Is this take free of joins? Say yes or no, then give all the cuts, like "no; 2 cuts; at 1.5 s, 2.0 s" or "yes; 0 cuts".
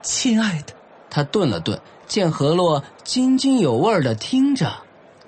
no; 1 cut; at 1.8 s